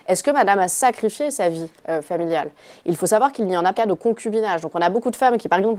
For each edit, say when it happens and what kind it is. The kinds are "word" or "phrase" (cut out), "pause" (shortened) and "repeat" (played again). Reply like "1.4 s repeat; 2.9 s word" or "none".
1.8 s pause; 3.7 s word

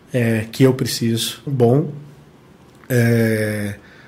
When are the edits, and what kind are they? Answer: 1.5 s phrase

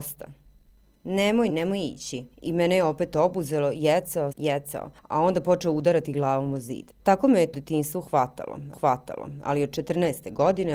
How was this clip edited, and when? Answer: 1.5 s word; 2.3 s pause; 4.3 s word; 7.0 s pause; 7.5 s word; 8.7 s repeat

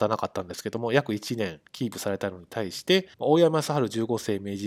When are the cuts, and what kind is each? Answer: 1.7 s pause; 3.1 s pause

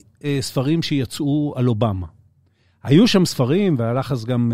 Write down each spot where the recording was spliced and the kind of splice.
none

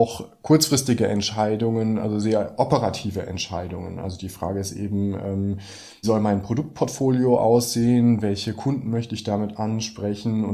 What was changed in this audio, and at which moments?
6.0 s word

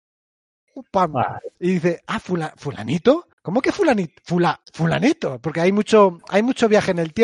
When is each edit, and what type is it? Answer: 1.5 s pause; 3.3 s pause; 4.6 s pause

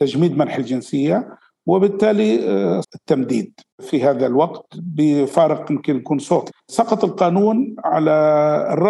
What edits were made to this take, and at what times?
2.8 s word

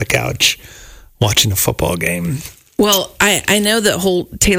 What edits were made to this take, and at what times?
none

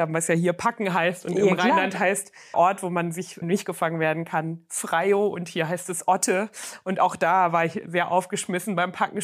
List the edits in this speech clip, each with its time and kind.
2.5 s word; 3.4 s word

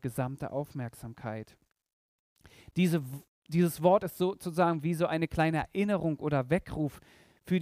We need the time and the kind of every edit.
none

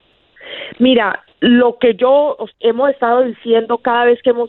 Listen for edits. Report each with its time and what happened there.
1.3 s pause; 2.5 s word

